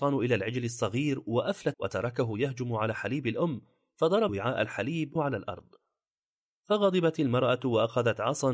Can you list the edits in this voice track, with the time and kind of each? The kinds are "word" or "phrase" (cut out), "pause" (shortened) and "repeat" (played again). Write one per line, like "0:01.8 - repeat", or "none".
0:01.7 - word
0:04.3 - word
0:05.2 - word